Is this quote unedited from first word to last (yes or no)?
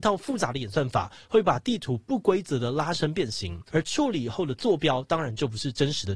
no